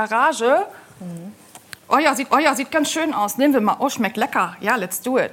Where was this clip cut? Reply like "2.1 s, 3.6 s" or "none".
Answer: 2.3 s